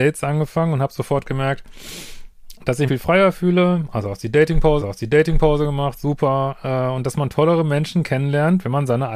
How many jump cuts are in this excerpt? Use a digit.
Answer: 2